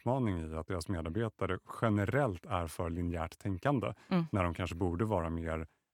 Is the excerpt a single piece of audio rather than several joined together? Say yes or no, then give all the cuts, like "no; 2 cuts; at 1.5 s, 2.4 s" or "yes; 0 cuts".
yes; 0 cuts